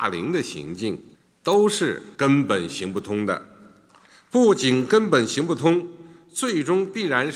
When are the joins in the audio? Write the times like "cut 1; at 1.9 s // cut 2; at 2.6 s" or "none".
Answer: cut 1; at 1.1 s // cut 2; at 2.1 s

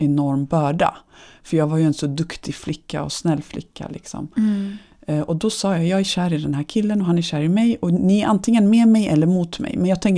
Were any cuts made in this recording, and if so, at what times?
none

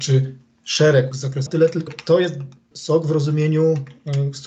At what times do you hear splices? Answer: cut 1; at 1.1 s // cut 2; at 1.5 s // cut 3; at 1.9 s // cut 4; at 2.7 s

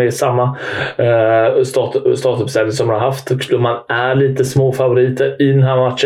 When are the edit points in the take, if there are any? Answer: none

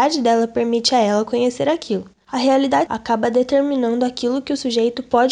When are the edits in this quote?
cut 1; at 2.9 s

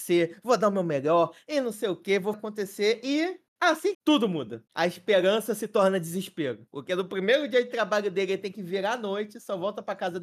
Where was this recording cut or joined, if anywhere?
cut 1; at 2.3 s // cut 2; at 3.9 s

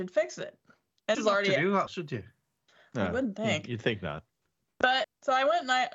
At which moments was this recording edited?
cut 1; at 1.1 s // cut 2; at 1.9 s // cut 3; at 5.0 s

